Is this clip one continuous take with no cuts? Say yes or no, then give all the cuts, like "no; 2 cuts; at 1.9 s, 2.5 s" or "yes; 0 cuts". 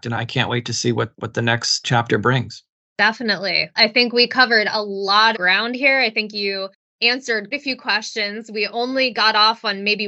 no; 3 cuts; at 3.8 s, 5.3 s, 7.5 s